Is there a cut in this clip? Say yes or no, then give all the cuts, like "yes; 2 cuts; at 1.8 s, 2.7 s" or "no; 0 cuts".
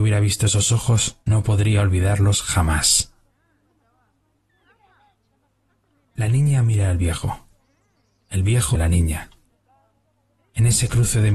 yes; 2 cuts; at 1.2 s, 8.7 s